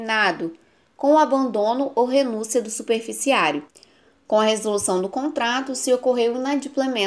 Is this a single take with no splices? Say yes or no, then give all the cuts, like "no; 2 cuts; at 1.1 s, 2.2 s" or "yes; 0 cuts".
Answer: yes; 0 cuts